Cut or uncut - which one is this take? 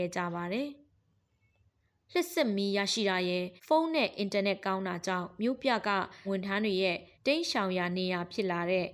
cut